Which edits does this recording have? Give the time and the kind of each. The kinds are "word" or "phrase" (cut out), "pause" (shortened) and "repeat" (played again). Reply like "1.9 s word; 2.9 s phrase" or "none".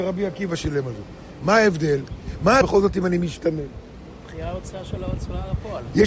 2.6 s phrase